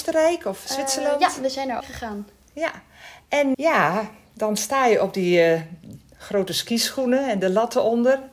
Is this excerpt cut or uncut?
cut